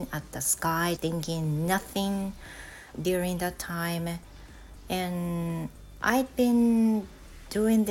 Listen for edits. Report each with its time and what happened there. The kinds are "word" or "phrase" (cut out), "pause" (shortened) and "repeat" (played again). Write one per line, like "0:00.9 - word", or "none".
0:01.0 - word
0:02.9 - word

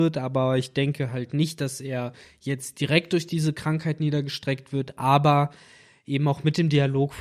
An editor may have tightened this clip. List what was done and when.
none

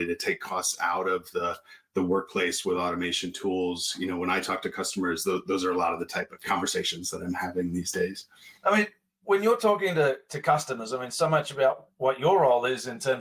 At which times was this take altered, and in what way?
0:08.6 - pause

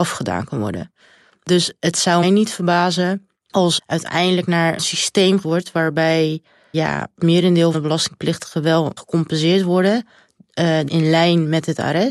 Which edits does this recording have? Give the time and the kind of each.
0:02.2 - word
0:03.8 - word
0:04.8 - word
0:05.4 - word
0:06.7 - word
0:07.2 - word
0:07.7 - word
0:09.0 - word
0:10.9 - word

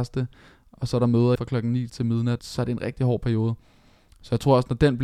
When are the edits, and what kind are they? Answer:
0:01.4 - word
0:01.9 - word
0:02.4 - word

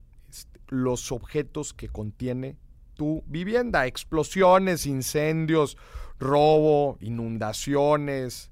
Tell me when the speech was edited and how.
none

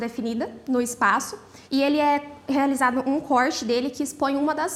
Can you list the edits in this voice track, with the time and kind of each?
0:01.6 - pause

